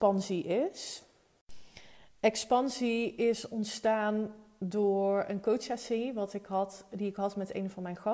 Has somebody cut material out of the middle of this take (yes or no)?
no